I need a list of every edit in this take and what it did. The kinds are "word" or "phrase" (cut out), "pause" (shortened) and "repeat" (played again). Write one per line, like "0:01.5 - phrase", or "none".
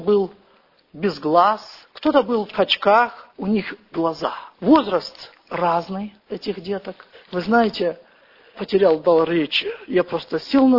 0:01.8 - pause
0:02.5 - word
0:03.3 - pause
0:03.9 - word
0:04.5 - pause
0:06.2 - pause
0:07.1 - pause
0:08.5 - word